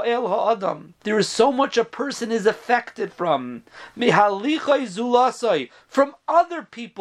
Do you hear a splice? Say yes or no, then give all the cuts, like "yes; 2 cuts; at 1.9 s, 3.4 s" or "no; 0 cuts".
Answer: yes; 1 cut; at 1.0 s